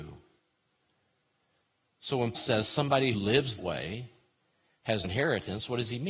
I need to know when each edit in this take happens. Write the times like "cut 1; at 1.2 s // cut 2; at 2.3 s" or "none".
cut 1; at 2.3 s // cut 2; at 3.1 s // cut 3; at 3.6 s // cut 4; at 5.0 s